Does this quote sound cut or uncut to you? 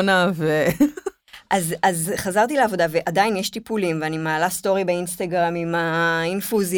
uncut